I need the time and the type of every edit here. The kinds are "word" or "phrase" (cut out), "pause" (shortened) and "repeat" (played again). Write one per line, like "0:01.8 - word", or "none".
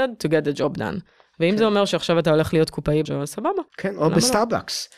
0:03.0 - word
0:03.7 - pause